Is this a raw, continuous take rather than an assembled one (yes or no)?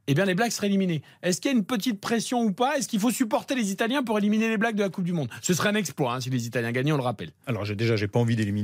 yes